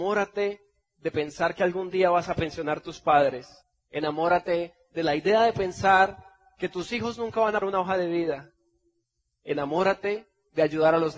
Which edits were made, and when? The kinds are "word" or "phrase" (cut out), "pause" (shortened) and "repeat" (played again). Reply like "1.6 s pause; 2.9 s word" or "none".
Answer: 3.6 s pause; 7.6 s word